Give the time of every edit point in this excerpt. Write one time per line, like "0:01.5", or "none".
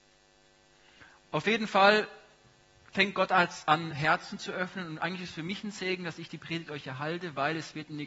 none